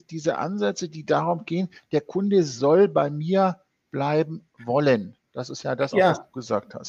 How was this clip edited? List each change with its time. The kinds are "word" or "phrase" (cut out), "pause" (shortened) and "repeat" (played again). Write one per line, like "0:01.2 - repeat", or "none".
none